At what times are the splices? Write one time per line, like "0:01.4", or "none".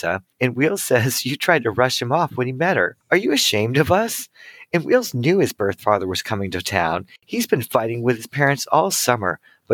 0:03.0
0:07.2